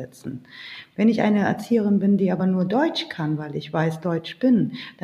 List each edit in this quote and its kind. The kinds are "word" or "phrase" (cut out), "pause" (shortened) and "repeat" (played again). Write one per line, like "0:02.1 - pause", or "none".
none